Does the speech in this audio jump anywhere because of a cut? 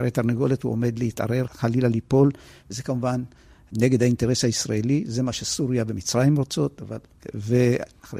no; 0 cuts

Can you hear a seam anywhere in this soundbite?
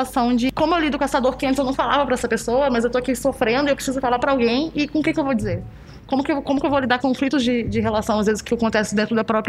yes; 1 cut; at 7.0 s

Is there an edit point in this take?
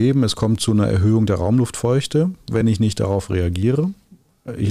no; 0 cuts

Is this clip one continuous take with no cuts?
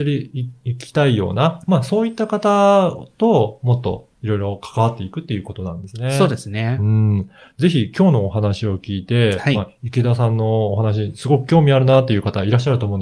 yes; 0 cuts

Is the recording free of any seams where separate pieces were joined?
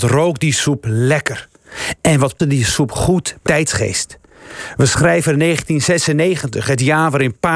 no; 2 cuts; at 2.4 s, 3.5 s

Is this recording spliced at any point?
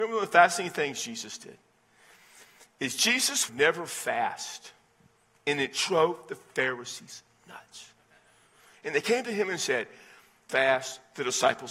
yes; 2 cuts; at 3.5 s, 10.5 s

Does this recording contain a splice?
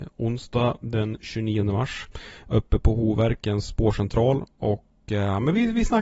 no; 0 cuts

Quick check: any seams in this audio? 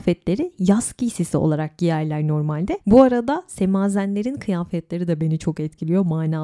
no; 0 cuts

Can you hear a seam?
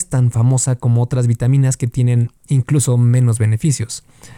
no; 0 cuts

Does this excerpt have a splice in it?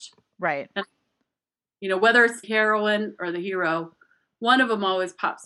yes; 1 cut; at 2.4 s

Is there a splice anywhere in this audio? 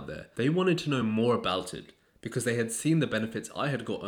no; 0 cuts

